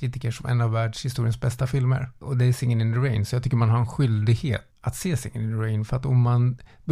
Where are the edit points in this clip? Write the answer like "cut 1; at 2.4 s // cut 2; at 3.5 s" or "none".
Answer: cut 1; at 4.7 s